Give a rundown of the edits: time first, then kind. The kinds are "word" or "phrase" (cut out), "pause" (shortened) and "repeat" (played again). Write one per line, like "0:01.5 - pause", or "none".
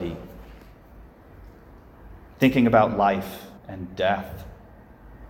0:03.6 - pause